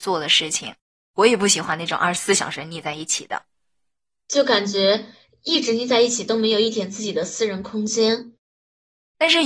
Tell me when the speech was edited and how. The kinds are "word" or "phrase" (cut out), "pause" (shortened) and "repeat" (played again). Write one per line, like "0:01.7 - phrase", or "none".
none